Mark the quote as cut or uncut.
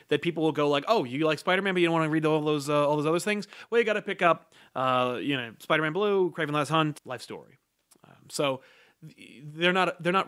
cut